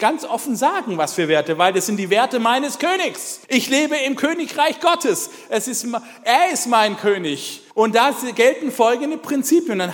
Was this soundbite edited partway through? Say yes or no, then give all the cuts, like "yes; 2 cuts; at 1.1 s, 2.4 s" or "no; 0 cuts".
yes; 2 cuts; at 3.4 s, 7.7 s